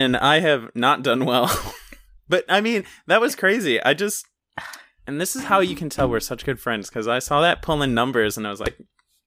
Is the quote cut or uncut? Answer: uncut